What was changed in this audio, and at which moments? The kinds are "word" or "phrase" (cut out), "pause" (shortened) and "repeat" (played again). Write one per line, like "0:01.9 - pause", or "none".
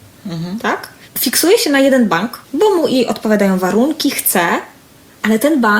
0:02.4 - pause